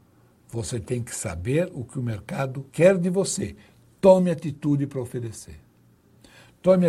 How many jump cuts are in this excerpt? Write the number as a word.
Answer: one